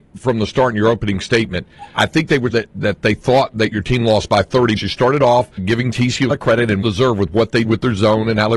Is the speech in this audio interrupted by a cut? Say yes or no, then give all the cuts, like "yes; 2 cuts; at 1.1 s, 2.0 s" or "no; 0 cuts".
yes; 7 cuts; at 1.9 s, 2.5 s, 4.8 s, 5.6 s, 6.3 s, 6.8 s, 7.6 s